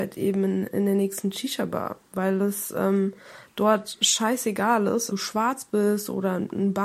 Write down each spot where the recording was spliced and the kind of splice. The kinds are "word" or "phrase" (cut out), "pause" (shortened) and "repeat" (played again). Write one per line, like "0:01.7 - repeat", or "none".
0:05.1 - phrase